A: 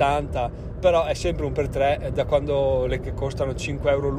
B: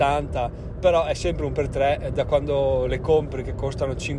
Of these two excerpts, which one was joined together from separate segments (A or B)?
A